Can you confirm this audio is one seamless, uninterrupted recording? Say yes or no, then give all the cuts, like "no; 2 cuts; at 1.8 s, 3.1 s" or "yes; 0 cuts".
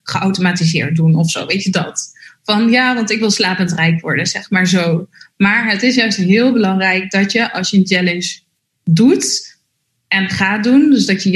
yes; 0 cuts